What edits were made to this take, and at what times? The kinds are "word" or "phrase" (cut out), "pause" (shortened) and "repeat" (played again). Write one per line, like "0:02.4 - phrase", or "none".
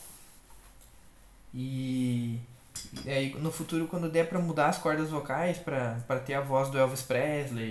none